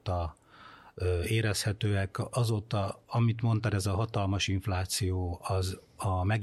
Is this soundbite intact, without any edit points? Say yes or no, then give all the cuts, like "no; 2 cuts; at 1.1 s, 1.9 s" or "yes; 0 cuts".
yes; 0 cuts